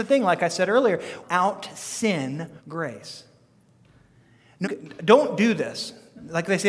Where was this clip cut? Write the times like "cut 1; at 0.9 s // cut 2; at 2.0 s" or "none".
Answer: cut 1; at 1.2 s // cut 2; at 2.6 s // cut 3; at 4.6 s